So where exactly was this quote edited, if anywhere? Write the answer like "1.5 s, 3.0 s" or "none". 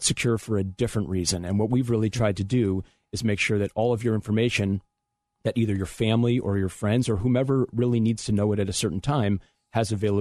none